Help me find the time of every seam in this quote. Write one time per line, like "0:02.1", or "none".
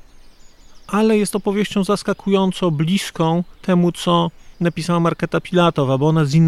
0:03.5
0:04.5